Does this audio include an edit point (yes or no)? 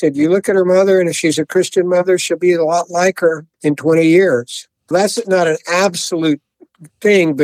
yes